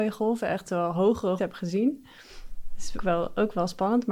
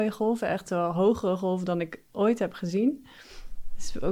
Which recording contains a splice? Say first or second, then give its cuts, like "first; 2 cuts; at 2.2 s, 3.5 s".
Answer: first; 2 cuts; at 1.4 s, 3.0 s